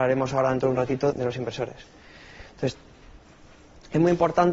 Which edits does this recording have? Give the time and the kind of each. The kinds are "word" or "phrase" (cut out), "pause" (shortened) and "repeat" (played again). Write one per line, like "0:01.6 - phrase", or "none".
0:01.1 - word